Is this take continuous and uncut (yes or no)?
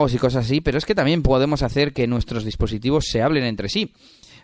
yes